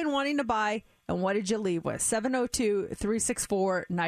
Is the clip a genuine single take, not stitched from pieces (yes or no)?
yes